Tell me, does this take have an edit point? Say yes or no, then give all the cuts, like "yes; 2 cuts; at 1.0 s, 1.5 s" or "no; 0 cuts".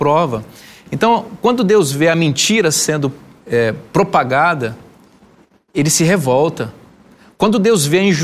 no; 0 cuts